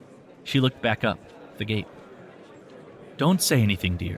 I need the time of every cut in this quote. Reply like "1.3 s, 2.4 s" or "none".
1.5 s

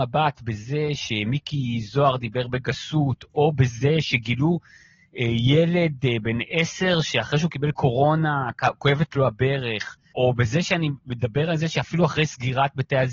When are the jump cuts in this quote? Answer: none

